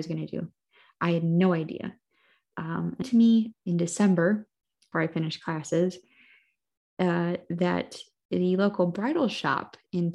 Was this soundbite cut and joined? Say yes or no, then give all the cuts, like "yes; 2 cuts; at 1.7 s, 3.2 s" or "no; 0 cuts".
yes; 3 cuts; at 3.0 s, 3.5 s, 4.9 s